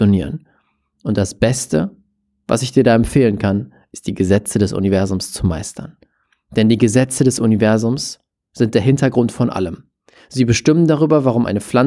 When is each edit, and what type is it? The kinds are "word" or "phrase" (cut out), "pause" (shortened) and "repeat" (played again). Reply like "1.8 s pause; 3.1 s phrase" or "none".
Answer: none